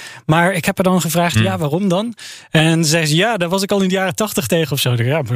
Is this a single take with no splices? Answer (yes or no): yes